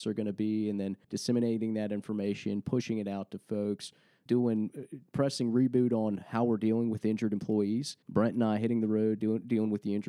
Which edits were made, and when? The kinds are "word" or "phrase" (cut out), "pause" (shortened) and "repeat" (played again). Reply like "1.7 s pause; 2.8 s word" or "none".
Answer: 1.0 s pause; 4.3 s word; 8.0 s pause; 9.2 s word